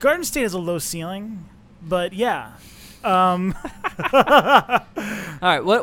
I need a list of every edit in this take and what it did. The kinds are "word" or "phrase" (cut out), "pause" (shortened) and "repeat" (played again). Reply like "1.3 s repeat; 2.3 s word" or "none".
none